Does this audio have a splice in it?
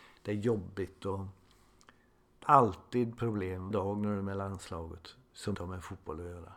yes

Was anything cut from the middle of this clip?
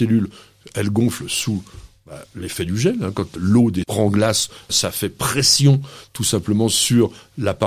yes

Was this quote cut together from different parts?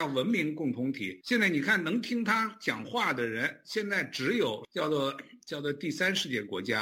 yes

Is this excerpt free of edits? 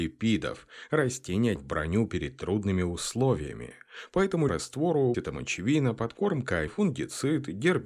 no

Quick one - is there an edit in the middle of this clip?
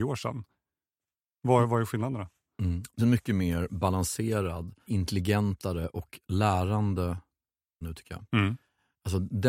yes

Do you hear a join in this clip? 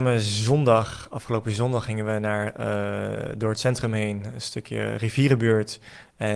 no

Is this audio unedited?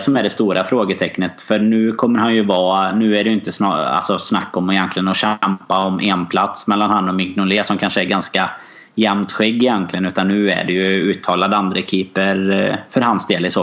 yes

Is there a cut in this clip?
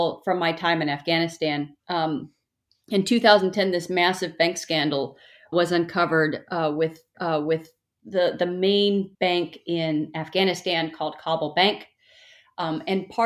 yes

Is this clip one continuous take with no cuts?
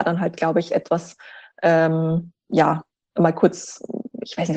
yes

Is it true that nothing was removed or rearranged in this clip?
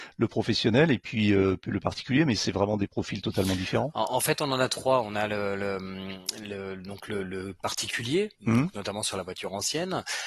no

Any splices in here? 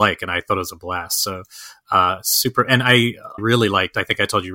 yes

